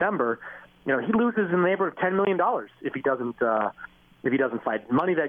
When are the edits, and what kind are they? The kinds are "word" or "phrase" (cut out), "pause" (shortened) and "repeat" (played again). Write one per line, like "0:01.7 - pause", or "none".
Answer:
none